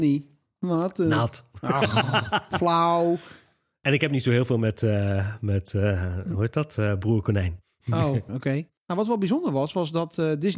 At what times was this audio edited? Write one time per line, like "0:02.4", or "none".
0:08.3
0:08.8

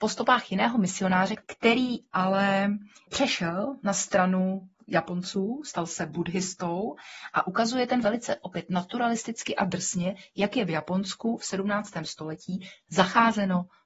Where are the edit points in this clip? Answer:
0:08.0

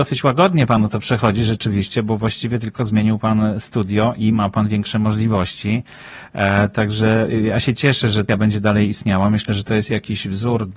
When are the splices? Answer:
0:08.3

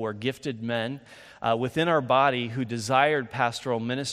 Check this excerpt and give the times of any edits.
none

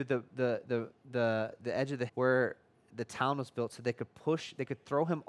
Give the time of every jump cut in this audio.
0:02.1

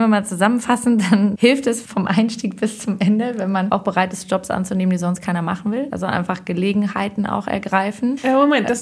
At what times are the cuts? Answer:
none

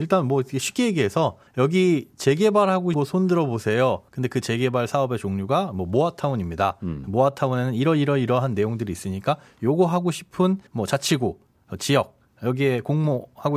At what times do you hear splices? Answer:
0:01.5
0:02.9
0:04.1
0:10.7

